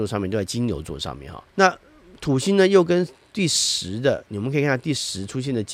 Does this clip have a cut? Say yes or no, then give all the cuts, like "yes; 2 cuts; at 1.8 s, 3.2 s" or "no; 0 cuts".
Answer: yes; 1 cut; at 1.5 s